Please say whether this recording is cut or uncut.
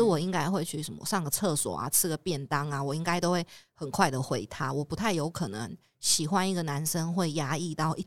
uncut